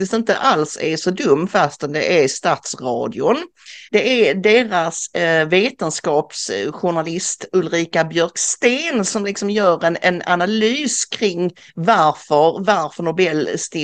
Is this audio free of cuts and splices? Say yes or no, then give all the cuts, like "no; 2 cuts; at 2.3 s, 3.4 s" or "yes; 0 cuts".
no; 2 cuts; at 3.9 s, 11.7 s